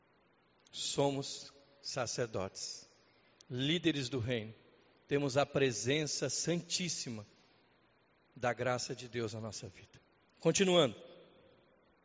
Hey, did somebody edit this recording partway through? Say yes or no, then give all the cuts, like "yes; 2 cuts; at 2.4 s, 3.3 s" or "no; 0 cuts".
no; 0 cuts